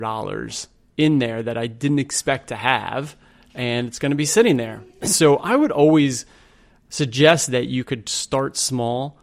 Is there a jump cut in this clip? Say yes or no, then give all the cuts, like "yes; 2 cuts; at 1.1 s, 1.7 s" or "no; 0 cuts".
no; 0 cuts